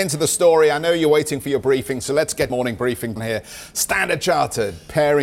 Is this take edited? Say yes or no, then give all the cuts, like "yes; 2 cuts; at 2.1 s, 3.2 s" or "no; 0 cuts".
yes; 2 cuts; at 2.5 s, 3.2 s